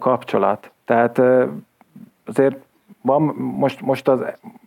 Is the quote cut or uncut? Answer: uncut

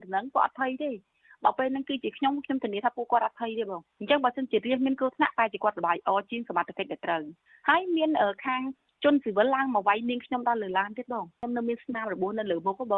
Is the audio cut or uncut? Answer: uncut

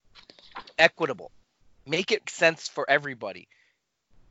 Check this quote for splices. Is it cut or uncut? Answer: cut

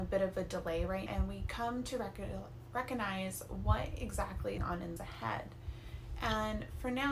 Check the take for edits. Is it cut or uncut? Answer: cut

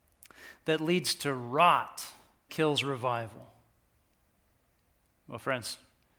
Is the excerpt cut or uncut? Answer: cut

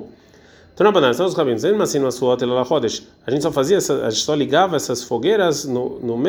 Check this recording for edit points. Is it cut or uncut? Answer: uncut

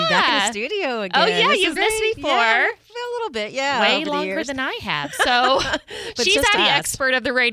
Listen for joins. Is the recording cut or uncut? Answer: cut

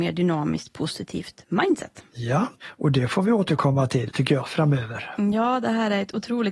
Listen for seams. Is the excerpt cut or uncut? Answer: uncut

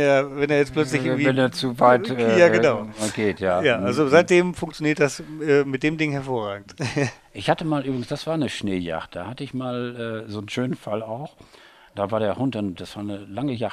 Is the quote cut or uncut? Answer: uncut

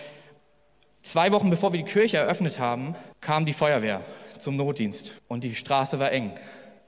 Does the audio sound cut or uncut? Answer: cut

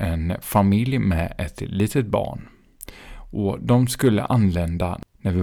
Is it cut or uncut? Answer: uncut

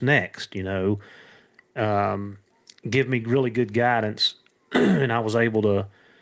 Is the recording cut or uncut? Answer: uncut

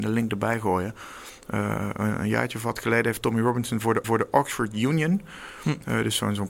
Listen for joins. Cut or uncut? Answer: cut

